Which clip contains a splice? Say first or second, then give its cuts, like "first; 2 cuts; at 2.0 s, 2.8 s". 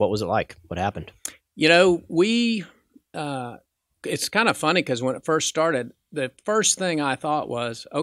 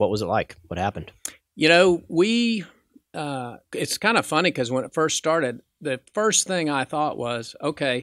second; 1 cut; at 3.6 s